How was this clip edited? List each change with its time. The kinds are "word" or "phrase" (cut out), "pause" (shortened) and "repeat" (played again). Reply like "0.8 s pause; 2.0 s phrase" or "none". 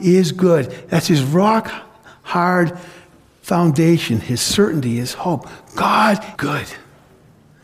6.4 s word